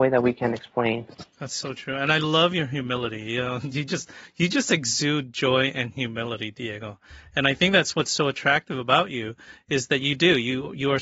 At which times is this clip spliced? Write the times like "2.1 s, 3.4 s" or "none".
1.3 s